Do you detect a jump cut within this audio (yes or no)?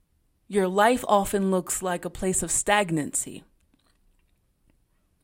no